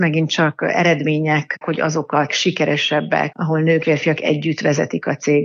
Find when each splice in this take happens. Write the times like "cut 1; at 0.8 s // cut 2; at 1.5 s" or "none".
cut 1; at 1.6 s // cut 2; at 2.3 s // cut 3; at 3.3 s // cut 4; at 3.8 s